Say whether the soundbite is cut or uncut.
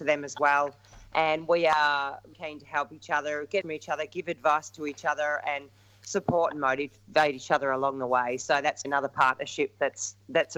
cut